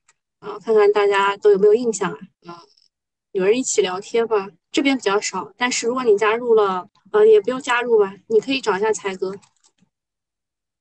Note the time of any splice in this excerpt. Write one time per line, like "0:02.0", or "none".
0:02.3
0:07.0